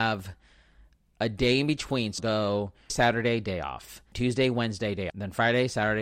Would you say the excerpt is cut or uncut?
cut